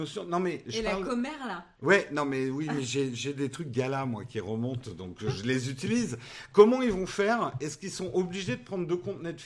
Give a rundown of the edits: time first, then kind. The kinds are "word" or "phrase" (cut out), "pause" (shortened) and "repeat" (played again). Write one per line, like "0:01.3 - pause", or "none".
none